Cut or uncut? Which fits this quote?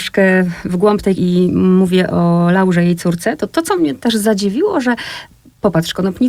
cut